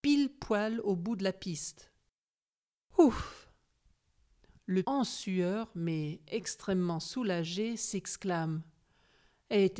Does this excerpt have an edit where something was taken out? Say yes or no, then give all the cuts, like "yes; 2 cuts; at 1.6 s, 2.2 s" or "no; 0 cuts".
yes; 1 cut; at 4.8 s